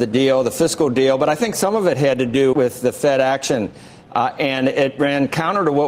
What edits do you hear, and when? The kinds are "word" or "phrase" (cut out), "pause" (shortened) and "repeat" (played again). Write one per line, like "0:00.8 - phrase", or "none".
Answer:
0:02.5 - word